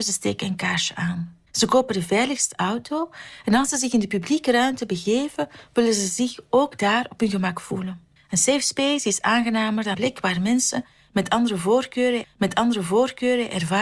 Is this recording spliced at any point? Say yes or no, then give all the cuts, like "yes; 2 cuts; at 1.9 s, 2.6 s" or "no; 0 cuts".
yes; 4 cuts; at 1.5 s, 8.2 s, 9.9 s, 12.2 s